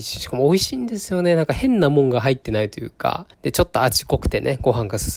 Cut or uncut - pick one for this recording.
cut